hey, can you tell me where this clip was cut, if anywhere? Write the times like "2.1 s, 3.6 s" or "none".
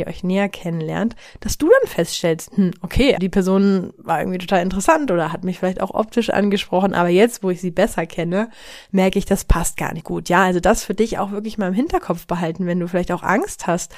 3.2 s, 10.0 s